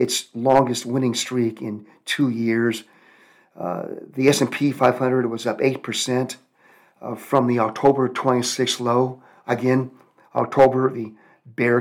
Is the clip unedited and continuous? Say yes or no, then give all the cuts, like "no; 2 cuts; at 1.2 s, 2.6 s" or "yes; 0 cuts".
yes; 0 cuts